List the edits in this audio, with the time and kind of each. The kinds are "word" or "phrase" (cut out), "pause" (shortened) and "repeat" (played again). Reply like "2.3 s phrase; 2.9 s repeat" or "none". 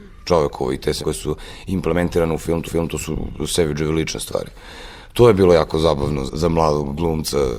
1.0 s phrase; 2.7 s repeat; 6.3 s word